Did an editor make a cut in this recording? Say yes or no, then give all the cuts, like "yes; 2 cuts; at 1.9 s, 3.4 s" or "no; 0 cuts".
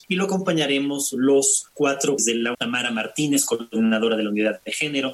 yes; 2 cuts; at 2.2 s, 2.5 s